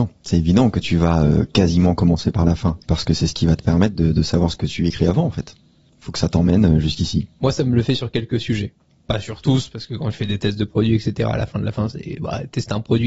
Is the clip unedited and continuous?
yes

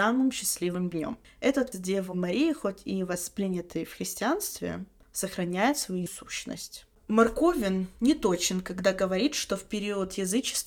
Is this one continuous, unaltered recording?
no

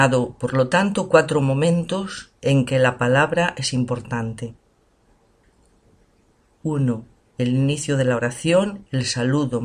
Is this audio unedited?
yes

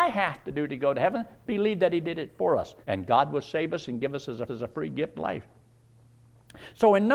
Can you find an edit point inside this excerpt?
yes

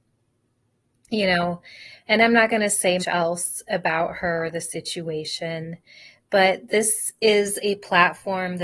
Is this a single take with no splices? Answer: no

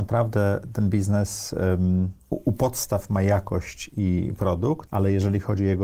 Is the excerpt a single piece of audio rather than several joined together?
yes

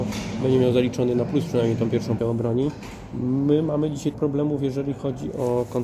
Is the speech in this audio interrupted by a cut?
yes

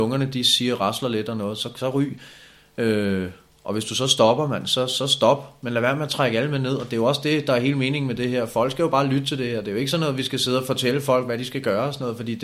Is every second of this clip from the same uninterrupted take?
yes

